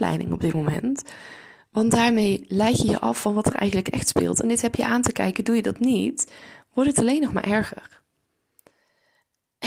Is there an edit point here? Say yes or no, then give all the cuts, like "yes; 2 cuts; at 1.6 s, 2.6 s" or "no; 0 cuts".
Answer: no; 0 cuts